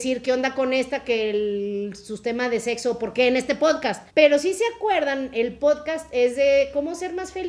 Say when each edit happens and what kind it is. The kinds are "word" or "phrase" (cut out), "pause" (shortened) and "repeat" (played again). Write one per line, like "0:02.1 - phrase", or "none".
0:04.1 - pause